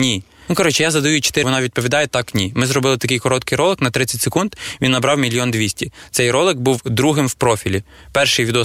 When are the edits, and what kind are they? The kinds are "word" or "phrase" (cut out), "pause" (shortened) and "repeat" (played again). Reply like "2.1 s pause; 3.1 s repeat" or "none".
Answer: 1.4 s word

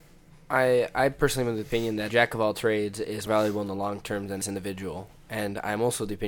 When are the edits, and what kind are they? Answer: 2.1 s word; 3.3 s word; 4.4 s phrase

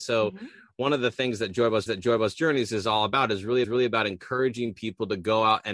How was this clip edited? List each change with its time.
1.9 s repeat; 3.6 s repeat

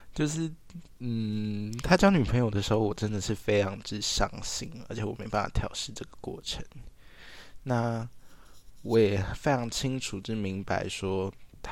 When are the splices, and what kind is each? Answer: none

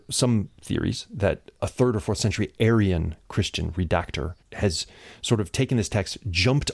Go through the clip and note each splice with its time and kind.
1.6 s word; 4.4 s pause

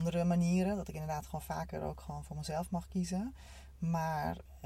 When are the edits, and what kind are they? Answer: none

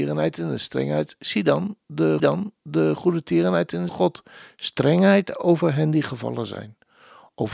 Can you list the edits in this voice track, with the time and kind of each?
2.2 s repeat; 3.9 s phrase

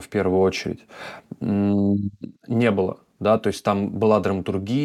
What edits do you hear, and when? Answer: 2.4 s pause

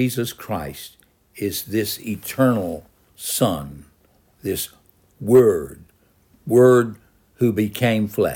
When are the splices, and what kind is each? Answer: none

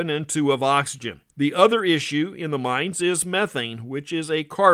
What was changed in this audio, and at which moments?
1.3 s pause

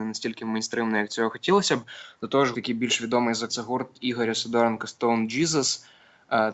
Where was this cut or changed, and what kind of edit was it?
2.5 s word; 3.5 s phrase

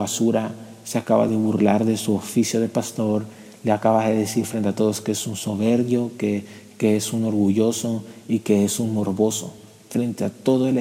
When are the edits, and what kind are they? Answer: none

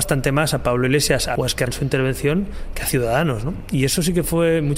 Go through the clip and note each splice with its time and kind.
1.4 s word; 1.7 s word

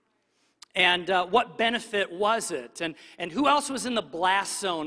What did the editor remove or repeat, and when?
none

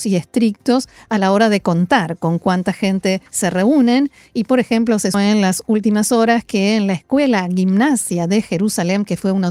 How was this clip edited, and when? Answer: 3.3 s pause; 5.1 s word

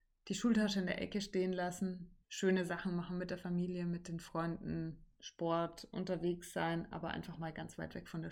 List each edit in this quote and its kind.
2.2 s pause

